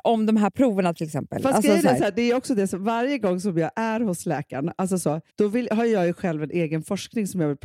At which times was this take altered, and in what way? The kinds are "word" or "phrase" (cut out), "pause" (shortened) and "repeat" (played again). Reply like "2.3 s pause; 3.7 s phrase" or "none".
5.3 s pause